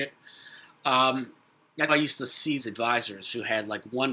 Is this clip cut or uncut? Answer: cut